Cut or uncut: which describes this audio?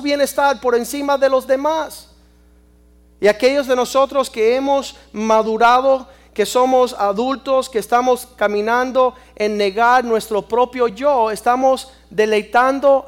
uncut